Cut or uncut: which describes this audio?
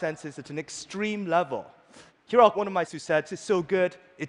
cut